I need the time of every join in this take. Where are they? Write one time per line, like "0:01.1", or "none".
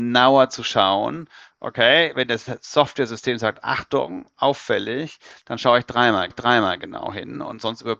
0:06.3